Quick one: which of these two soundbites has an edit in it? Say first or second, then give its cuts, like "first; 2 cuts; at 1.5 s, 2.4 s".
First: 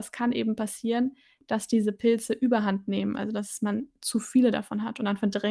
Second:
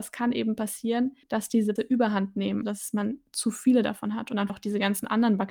second; 4 cuts; at 1.2 s, 1.8 s, 2.6 s, 4.5 s